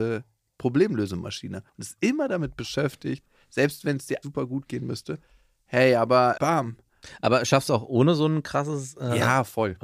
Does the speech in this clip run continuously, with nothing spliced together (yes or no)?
no